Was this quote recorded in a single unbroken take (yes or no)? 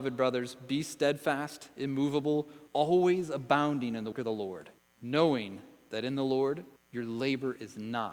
no